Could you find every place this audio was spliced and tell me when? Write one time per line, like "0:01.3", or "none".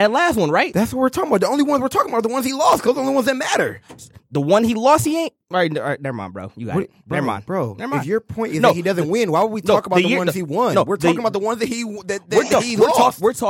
none